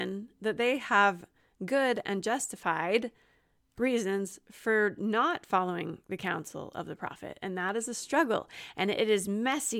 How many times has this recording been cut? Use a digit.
0